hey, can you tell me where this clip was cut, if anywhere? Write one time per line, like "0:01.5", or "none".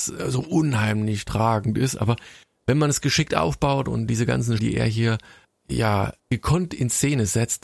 0:04.6
0:06.2